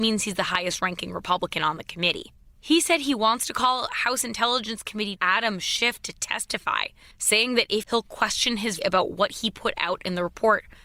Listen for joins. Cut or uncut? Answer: cut